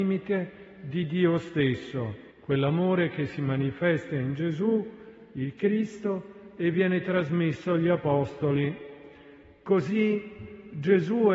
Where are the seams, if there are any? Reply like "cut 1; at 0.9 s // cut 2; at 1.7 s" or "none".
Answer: cut 1; at 2.3 s